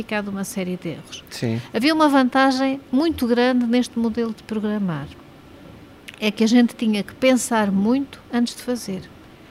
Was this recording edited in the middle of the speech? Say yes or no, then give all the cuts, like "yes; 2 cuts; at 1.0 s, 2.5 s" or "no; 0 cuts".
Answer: yes; 2 cuts; at 2.9 s, 8.3 s